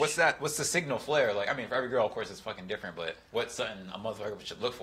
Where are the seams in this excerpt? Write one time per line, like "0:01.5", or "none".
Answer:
0:03.3